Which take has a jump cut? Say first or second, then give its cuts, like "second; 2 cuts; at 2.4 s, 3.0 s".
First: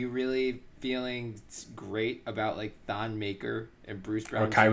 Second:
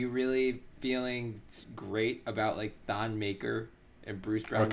first; 1 cut; at 3.8 s